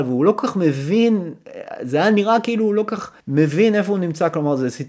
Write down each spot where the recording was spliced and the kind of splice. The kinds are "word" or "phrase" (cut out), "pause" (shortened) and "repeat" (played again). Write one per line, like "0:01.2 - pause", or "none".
0:03.2 - pause